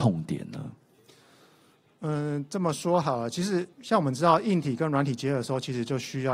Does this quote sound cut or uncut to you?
cut